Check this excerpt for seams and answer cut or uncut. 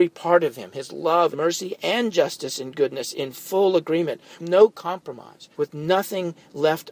cut